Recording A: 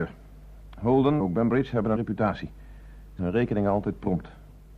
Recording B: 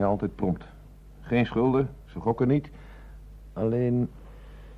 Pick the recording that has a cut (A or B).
A